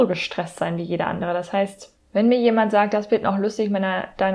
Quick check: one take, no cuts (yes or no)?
yes